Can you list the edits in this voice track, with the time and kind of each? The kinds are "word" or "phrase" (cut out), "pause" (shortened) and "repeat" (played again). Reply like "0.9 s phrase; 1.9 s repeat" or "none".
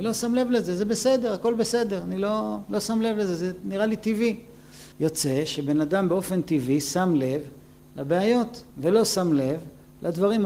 4.9 s pause; 8.7 s pause